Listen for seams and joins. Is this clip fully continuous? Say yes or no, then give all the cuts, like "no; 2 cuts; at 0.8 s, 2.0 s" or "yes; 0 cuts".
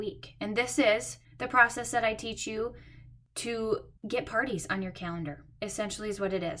no; 2 cuts; at 1.2 s, 4.0 s